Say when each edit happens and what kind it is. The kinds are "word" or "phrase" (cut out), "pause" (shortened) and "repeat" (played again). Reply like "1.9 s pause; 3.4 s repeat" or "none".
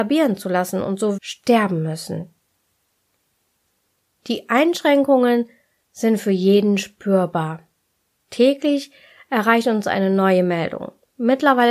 1.2 s phrase